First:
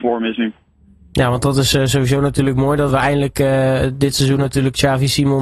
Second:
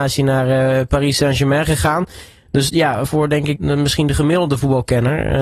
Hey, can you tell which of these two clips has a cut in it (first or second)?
second